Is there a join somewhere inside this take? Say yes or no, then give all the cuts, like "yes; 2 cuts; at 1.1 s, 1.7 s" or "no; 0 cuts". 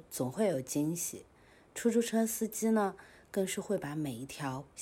no; 0 cuts